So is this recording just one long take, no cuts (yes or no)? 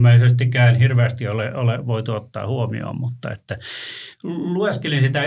yes